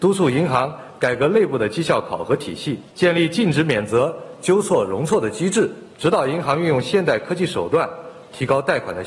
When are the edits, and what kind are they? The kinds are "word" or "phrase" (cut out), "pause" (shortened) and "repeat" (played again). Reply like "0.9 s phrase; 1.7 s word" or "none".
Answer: 2.9 s pause